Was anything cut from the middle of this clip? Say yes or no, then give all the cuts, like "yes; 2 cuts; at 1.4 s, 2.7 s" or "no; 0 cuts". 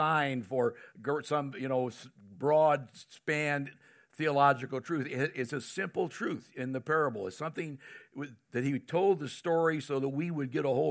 no; 0 cuts